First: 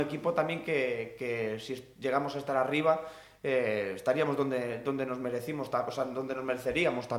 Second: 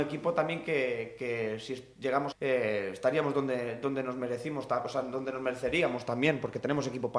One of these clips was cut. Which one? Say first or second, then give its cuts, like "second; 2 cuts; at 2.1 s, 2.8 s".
second; 1 cut; at 2.3 s